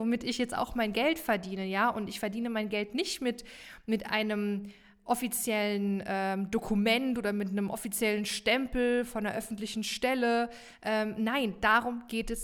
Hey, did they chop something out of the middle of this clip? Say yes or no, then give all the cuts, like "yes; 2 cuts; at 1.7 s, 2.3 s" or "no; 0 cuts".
no; 0 cuts